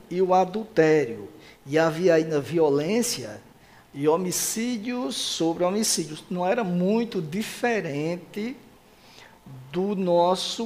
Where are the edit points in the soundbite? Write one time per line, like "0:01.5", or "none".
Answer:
none